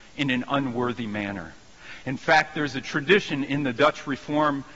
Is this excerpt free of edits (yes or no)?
yes